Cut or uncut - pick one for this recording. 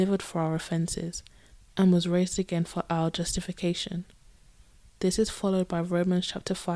uncut